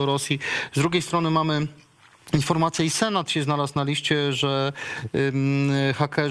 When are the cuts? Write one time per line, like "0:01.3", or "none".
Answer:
none